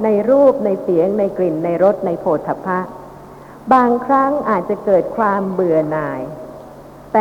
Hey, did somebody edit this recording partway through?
no; 0 cuts

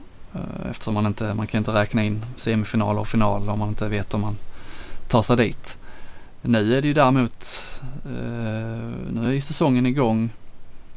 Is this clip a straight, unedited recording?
yes; 0 cuts

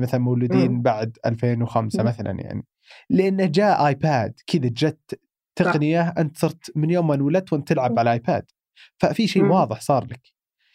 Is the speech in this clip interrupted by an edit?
no; 0 cuts

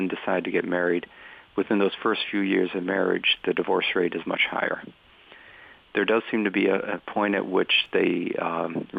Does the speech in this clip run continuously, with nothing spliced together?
yes; 0 cuts

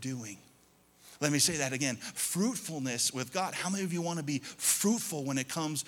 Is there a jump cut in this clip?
no; 0 cuts

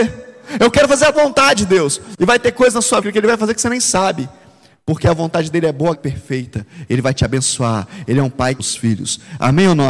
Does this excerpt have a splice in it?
yes; 4 cuts; at 1.1 s, 3.0 s, 5.9 s, 8.6 s

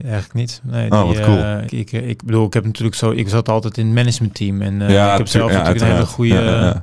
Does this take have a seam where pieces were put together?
yes; 1 cut; at 1.7 s

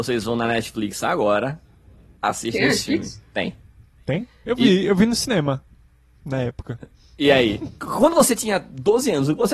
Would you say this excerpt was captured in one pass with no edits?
yes; 0 cuts

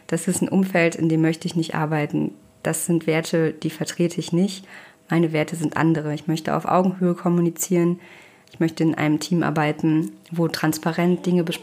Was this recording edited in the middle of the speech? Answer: no; 0 cuts

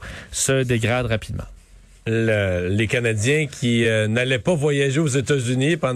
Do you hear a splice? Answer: no; 0 cuts

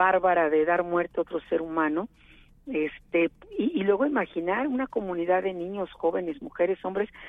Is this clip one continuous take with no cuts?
yes; 0 cuts

